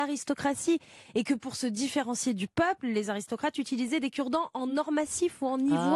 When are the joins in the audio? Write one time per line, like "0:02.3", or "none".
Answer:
none